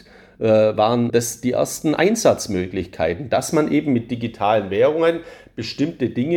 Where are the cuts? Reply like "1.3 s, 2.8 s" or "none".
1.1 s